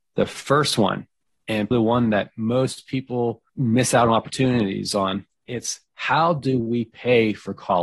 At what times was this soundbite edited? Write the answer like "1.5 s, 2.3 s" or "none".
1.7 s, 3.5 s